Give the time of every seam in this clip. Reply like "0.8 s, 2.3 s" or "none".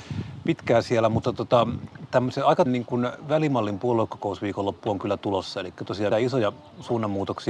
2.7 s, 6.1 s